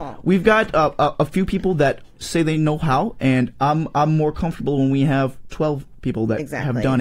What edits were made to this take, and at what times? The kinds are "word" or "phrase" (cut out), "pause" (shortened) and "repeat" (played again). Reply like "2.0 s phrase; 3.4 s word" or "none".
2.1 s pause

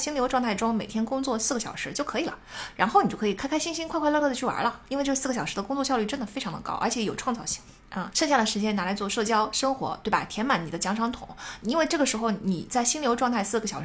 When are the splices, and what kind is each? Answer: 8.1 s word

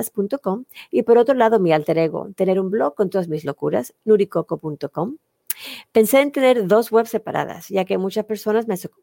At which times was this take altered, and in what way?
none

